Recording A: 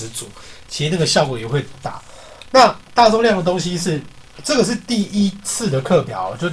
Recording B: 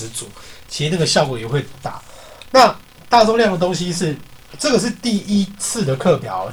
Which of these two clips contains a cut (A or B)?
A